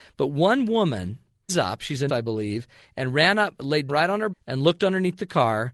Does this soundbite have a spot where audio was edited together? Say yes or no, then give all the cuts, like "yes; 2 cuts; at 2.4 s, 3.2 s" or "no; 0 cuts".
yes; 4 cuts; at 1.5 s, 2.1 s, 3.9 s, 4.3 s